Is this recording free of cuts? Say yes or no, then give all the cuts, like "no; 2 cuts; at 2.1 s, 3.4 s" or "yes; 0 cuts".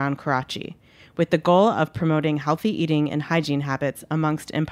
yes; 0 cuts